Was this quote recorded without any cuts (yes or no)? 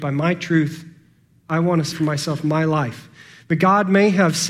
no